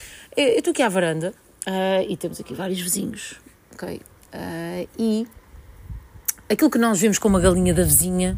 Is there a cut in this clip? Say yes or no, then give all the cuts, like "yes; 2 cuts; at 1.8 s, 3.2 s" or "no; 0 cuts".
no; 0 cuts